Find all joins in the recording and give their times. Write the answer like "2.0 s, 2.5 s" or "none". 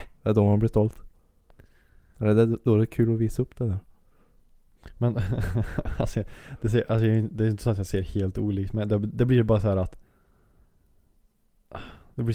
none

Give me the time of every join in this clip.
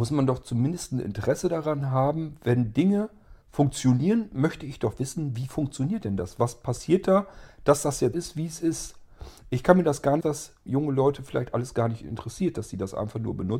3.4 s, 8.1 s, 10.2 s, 10.7 s

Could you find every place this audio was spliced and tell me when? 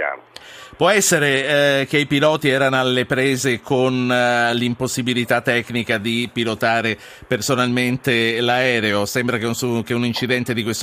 none

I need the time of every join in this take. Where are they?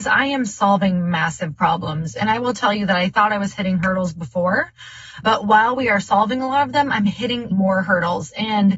7.5 s

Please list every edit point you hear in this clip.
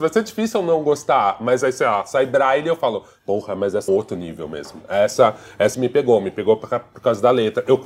3.9 s, 5.7 s

